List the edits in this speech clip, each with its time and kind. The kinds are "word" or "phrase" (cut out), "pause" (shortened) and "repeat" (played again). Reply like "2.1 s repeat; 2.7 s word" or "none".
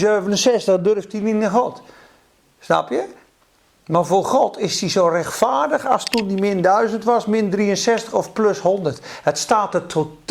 none

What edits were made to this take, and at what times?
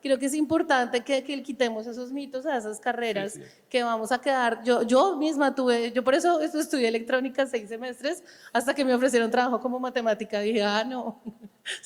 none

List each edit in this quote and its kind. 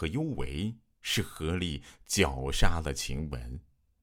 none

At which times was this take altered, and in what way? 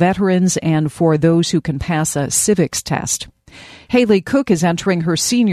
none

